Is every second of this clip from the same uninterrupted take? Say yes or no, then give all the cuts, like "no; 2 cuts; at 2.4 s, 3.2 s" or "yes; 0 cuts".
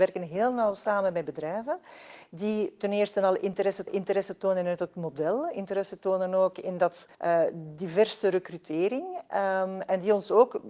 no; 2 cuts; at 3.9 s, 7.1 s